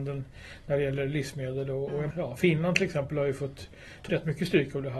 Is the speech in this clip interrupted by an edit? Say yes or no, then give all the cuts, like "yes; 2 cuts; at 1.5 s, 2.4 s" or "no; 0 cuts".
yes; 2 cuts; at 2.1 s, 4.1 s